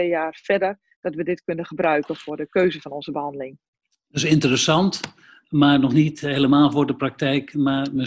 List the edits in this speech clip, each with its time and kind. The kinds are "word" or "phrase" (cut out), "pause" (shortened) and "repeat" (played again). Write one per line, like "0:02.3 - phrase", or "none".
none